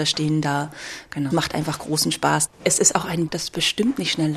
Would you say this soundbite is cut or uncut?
cut